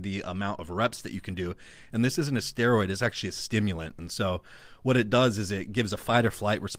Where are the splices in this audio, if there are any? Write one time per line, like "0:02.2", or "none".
none